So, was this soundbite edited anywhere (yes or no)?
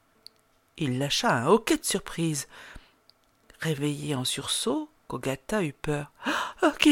no